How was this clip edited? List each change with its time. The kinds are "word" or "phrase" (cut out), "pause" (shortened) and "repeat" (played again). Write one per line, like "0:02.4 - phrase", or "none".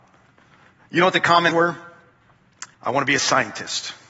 0:01.5 - word
0:02.7 - pause